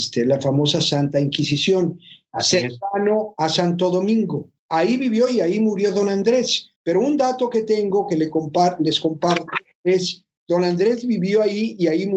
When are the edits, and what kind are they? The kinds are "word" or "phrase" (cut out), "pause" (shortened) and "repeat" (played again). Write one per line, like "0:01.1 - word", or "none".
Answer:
0:04.6 - pause
0:06.8 - pause